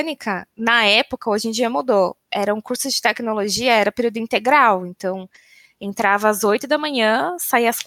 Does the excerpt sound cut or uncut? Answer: uncut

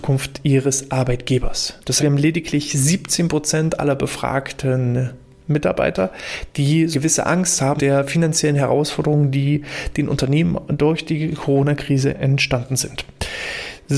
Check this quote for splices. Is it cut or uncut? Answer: cut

